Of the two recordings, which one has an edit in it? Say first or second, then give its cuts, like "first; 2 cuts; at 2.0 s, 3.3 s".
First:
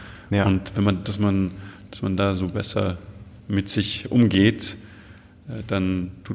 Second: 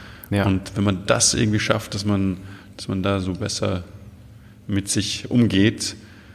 first; 2 cuts; at 1.0 s, 3.4 s